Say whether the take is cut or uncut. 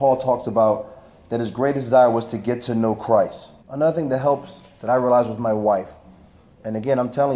cut